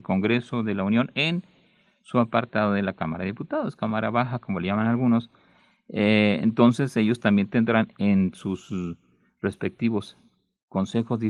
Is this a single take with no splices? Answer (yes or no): yes